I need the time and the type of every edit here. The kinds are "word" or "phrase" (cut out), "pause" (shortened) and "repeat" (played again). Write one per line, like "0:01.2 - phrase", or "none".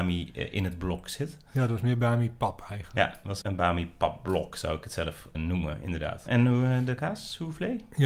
0:03.4 - word
0:05.3 - word